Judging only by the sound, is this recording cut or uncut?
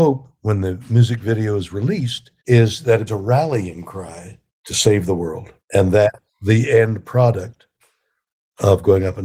cut